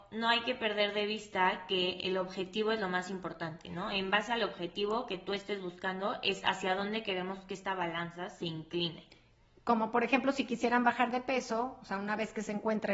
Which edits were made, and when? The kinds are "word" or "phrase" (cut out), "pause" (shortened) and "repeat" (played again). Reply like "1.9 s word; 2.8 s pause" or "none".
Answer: none